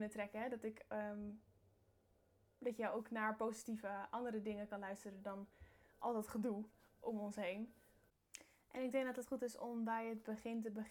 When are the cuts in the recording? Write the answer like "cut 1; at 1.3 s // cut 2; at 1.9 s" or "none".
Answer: none